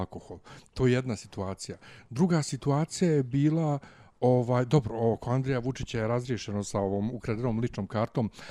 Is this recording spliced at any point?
no; 0 cuts

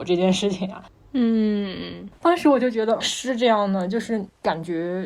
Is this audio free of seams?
no; 1 cut; at 3.0 s

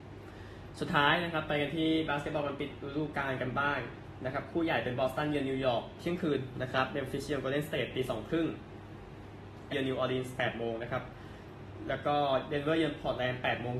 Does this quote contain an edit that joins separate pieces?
yes; 1 cut; at 9.7 s

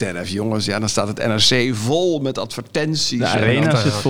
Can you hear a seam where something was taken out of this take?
no; 0 cuts

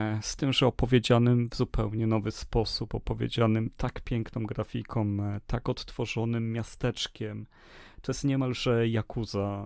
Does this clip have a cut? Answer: no; 0 cuts

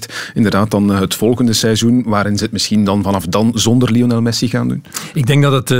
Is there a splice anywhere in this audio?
no; 0 cuts

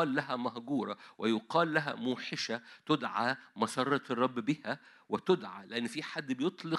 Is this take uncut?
yes; 0 cuts

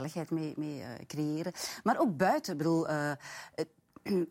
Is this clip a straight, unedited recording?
yes; 0 cuts

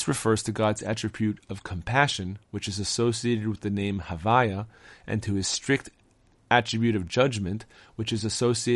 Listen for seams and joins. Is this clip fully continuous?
yes; 0 cuts

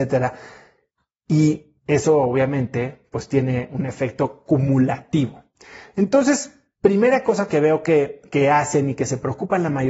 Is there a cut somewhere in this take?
yes; 1 cut; at 1.8 s

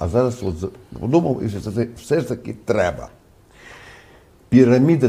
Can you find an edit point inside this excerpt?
no; 0 cuts

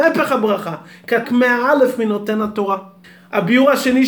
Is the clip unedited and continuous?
no; 2 cuts; at 1.2 s, 3.0 s

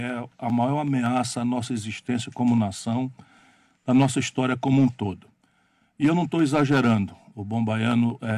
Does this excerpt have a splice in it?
no; 0 cuts

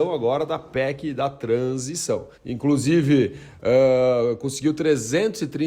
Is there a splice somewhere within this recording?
yes; 1 cut; at 2.3 s

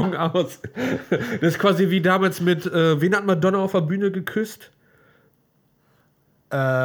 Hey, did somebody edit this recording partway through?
no; 0 cuts

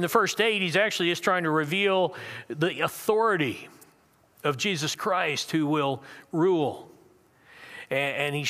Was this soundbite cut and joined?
no; 0 cuts

